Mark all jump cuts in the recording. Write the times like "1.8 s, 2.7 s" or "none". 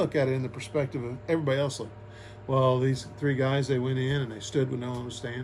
none